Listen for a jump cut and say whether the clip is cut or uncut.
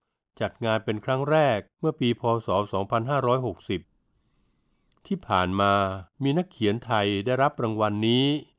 cut